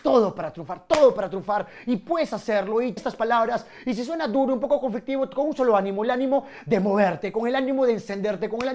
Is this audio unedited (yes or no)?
no